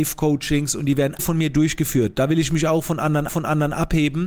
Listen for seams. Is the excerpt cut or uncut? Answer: cut